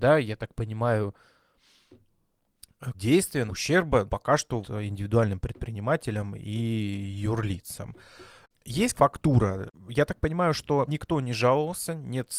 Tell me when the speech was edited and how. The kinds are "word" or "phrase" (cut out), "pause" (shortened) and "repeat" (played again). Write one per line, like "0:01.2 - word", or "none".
0:02.9 - word
0:03.5 - word
0:04.1 - word
0:04.6 - word
0:08.9 - word
0:10.9 - word